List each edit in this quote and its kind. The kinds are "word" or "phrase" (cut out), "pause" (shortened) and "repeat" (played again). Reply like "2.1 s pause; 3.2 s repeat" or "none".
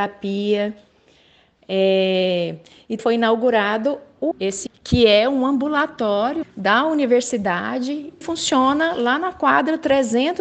3.0 s word; 4.3 s word; 4.7 s word; 6.4 s word; 8.2 s word